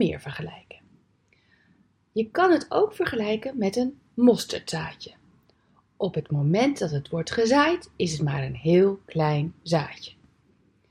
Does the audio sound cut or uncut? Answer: uncut